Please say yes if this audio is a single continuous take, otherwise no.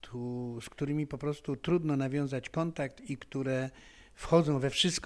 yes